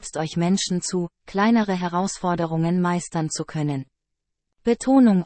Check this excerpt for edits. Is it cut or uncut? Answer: uncut